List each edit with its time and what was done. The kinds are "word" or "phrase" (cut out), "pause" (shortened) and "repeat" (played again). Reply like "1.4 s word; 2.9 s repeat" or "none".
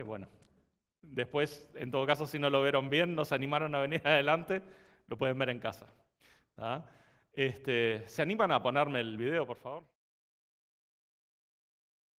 none

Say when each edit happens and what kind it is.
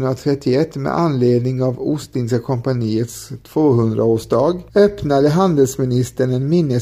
4.7 s pause

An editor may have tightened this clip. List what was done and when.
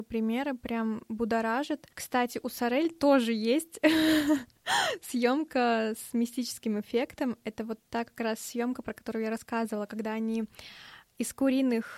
1.9 s pause

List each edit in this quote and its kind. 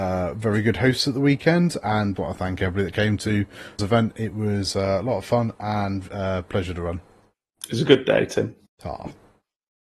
2.2 s word; 3.8 s phrase; 8.7 s pause

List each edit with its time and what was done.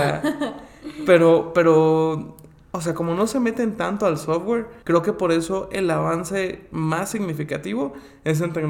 4.8 s pause

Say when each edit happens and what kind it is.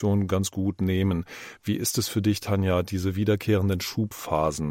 none

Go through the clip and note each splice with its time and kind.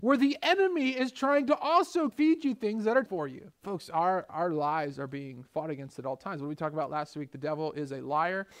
2.1 s phrase; 3.1 s word; 3.6 s pause

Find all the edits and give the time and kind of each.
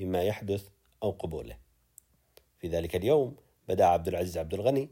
none

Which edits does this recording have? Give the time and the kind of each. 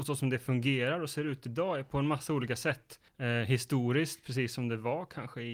3.1 s pause

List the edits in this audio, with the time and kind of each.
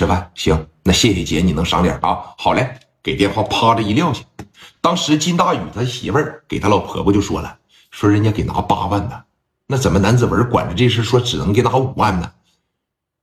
none

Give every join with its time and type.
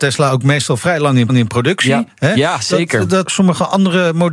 1.3 s repeat; 3.3 s phrase

